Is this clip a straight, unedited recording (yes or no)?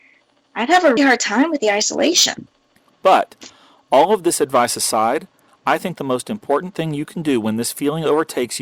no